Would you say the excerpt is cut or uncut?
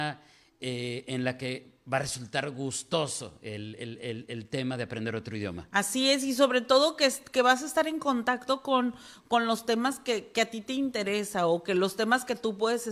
uncut